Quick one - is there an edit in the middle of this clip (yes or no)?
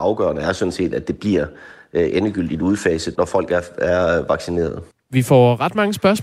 yes